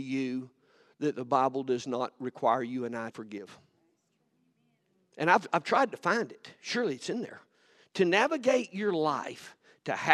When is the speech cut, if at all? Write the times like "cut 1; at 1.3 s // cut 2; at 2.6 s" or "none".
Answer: cut 1; at 3.1 s // cut 2; at 7.5 s

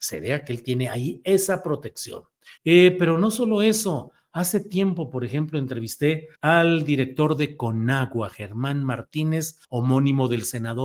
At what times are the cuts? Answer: cut 1; at 2.6 s // cut 2; at 6.4 s // cut 3; at 9.6 s

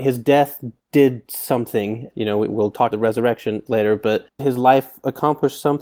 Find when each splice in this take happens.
cut 1; at 2.1 s // cut 2; at 2.9 s // cut 3; at 4.4 s

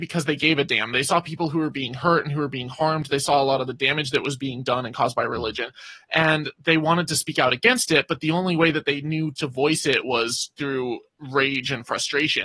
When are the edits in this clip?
none

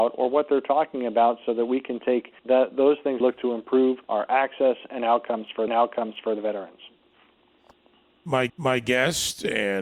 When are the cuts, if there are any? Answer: cut 1; at 2.4 s // cut 2; at 3.2 s // cut 3; at 4.0 s // cut 4; at 5.7 s // cut 5; at 8.5 s

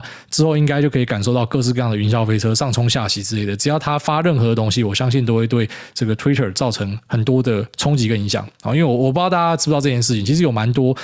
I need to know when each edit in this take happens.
none

